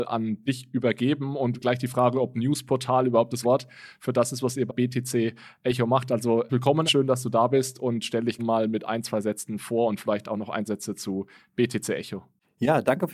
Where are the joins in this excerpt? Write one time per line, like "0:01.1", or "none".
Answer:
0:01.6
0:03.4
0:04.7
0:06.5
0:06.9
0:08.4
0:10.7